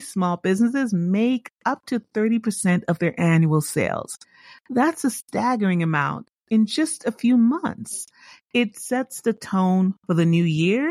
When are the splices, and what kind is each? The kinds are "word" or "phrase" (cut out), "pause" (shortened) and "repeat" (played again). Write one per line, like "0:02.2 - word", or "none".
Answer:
none